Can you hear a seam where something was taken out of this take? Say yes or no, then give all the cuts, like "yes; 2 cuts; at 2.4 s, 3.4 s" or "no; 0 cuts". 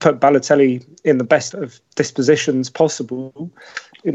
yes; 1 cut; at 1.5 s